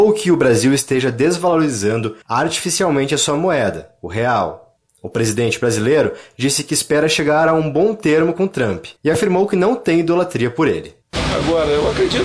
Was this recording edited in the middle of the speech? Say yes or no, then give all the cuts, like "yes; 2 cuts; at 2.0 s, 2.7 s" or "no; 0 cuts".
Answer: yes; 3 cuts; at 2.2 s, 9.0 s, 11.0 s